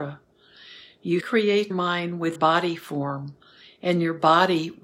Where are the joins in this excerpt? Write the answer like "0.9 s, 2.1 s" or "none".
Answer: 1.2 s, 1.7 s, 2.4 s